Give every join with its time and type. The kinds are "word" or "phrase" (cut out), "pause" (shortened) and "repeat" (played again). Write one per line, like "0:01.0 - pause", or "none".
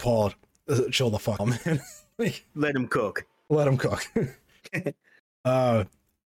0:01.4 - word